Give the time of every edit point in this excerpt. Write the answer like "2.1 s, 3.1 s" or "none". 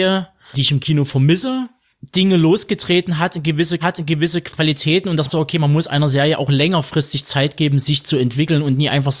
3.8 s, 5.3 s

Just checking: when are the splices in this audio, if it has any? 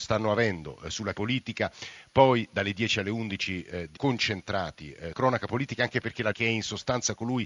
1.1 s, 4.0 s, 5.1 s, 6.3 s

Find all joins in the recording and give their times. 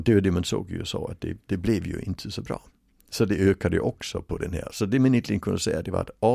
none

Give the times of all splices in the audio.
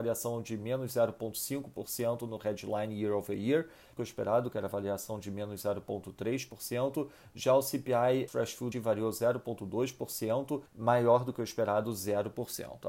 4.0 s, 8.3 s, 8.7 s, 10.7 s

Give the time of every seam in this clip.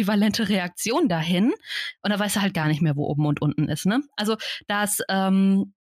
none

